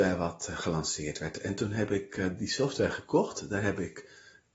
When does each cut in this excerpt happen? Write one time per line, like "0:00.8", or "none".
none